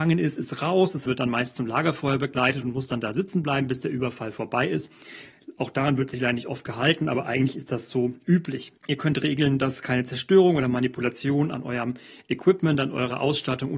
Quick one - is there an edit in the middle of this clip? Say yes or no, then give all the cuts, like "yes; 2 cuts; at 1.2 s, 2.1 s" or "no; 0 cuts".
yes; 2 cuts; at 1.1 s, 8.8 s